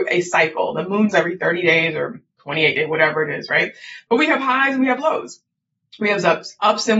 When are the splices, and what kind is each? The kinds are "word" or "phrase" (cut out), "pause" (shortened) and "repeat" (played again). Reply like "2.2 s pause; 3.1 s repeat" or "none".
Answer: 1.1 s word; 2.3 s pause

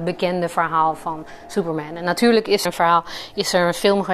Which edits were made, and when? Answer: 2.6 s word

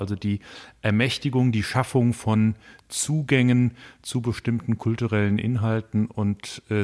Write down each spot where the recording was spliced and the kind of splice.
none

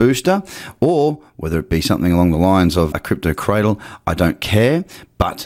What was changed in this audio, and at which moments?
2.9 s word

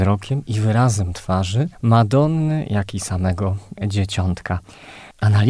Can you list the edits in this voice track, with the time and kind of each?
1.7 s pause

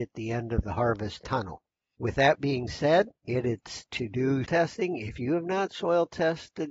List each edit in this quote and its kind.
3.9 s word; 4.4 s word

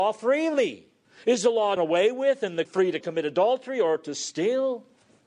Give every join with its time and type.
1.0 s pause; 1.8 s word; 2.7 s word; 3.0 s word

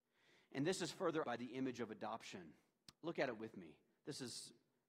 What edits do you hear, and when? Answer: 1.2 s word; 2.9 s pause

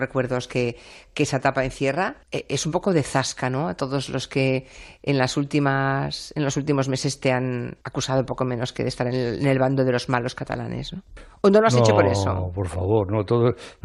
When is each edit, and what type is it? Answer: 2.2 s pause; 7.8 s pause

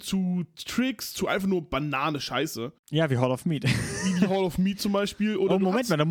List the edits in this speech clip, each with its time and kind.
none

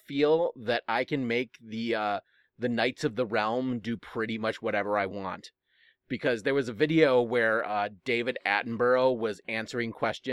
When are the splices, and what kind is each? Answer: none

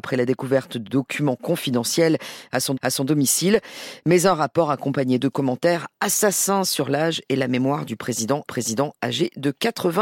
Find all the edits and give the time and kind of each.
2.8 s repeat; 5.2 s word; 8.5 s repeat

